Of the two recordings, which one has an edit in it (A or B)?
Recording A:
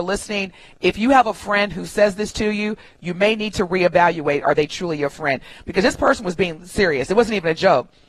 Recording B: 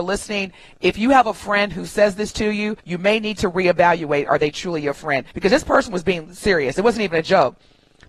B